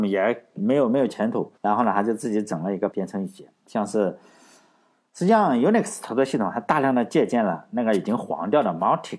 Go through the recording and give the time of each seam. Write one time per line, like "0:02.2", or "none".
0:01.6
0:02.9